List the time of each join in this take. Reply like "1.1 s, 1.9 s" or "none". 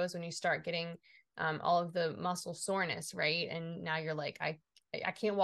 none

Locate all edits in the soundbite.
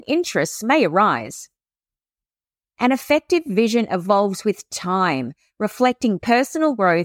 none

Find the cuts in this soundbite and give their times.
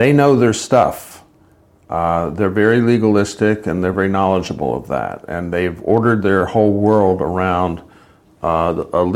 none

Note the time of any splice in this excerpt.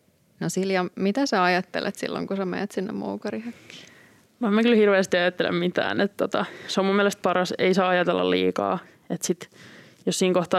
none

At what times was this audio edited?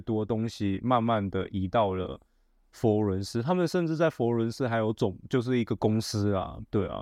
none

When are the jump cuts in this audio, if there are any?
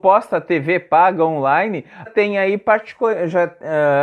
2.1 s

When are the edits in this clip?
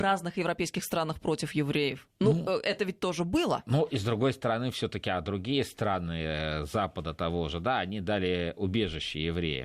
2.1 s

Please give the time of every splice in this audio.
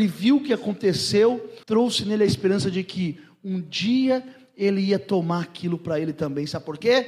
1.6 s

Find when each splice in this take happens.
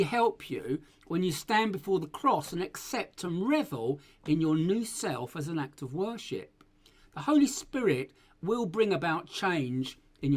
none

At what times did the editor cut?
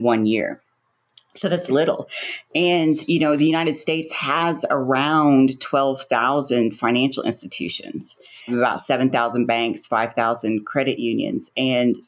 1.7 s

